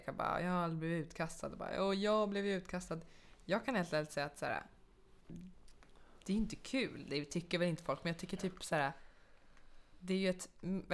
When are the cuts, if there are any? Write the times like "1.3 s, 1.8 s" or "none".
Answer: none